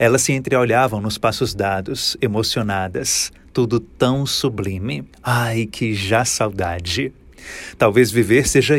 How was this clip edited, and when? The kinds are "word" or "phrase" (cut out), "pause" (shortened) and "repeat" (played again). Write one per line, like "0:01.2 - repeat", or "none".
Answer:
0:05.1 - pause